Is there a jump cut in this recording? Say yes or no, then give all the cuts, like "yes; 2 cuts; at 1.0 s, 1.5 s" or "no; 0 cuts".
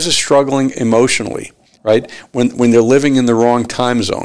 no; 0 cuts